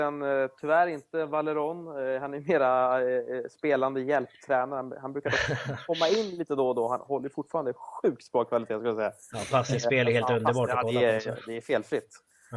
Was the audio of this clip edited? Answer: no; 0 cuts

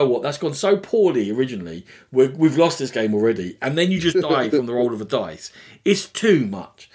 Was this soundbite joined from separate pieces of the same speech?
no; 0 cuts

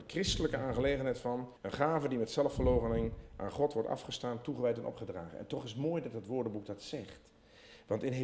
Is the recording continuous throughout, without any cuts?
no; 1 cut; at 1.6 s

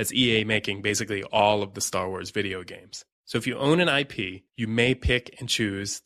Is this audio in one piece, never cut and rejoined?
no; 2 cuts; at 3.1 s, 4.5 s

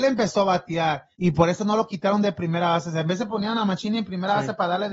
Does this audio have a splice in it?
yes; 1 cut; at 1.1 s

